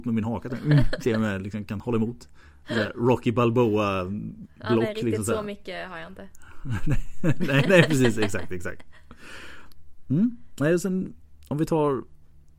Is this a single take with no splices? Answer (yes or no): no